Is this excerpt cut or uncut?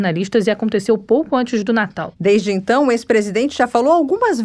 uncut